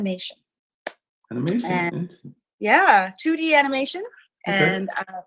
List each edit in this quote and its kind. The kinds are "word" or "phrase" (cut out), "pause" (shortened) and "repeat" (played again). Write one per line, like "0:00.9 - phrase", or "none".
none